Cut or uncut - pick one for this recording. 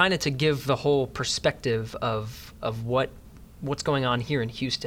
uncut